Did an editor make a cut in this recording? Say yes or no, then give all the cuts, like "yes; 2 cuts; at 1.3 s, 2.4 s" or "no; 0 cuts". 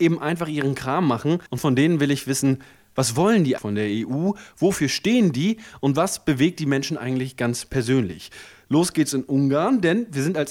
yes; 2 cuts; at 1.5 s, 3.6 s